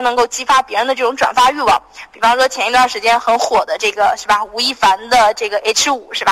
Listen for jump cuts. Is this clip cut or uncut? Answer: uncut